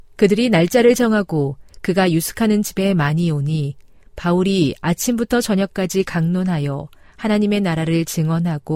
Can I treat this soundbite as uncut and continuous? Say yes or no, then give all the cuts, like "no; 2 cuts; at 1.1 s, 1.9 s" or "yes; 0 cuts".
yes; 0 cuts